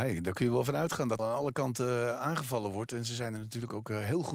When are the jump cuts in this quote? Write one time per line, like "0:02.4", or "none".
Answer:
0:01.2